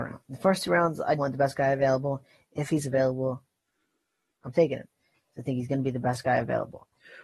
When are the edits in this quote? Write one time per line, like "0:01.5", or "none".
0:01.2